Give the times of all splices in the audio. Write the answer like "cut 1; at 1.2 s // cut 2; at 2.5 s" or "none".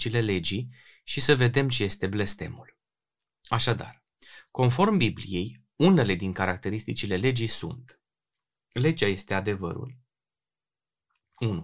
none